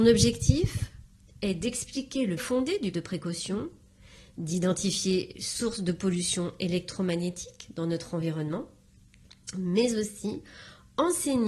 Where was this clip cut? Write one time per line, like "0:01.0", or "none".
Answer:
0:02.4
0:02.9
0:05.3